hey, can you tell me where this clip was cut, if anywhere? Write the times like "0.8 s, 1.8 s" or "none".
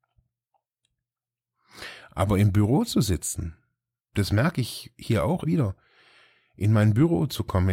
5.4 s